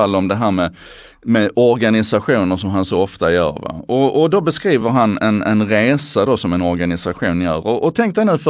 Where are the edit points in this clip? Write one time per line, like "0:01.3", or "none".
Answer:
none

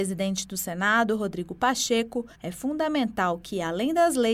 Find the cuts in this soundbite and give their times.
0:02.3

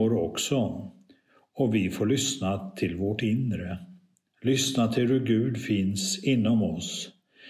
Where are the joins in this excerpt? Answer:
none

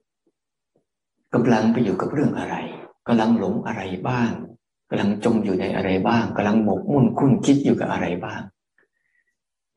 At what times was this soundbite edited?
0:03.0

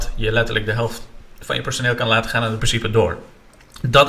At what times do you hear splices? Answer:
0:02.6

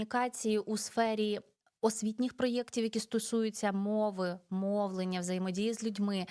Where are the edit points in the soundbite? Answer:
none

